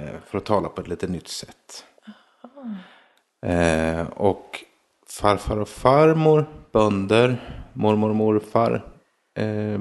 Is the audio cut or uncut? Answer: uncut